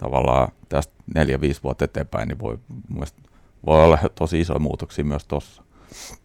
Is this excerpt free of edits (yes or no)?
yes